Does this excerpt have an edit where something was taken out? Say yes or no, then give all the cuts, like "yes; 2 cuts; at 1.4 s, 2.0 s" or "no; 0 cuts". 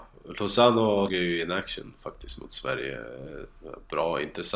yes; 1 cut; at 1.1 s